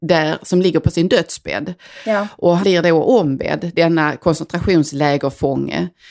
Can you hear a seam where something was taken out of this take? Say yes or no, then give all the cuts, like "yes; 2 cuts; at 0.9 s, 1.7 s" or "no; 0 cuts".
yes; 1 cut; at 2.6 s